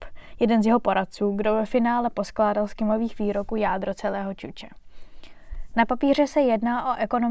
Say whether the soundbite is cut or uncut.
uncut